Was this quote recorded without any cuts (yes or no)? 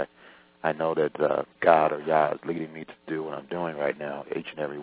no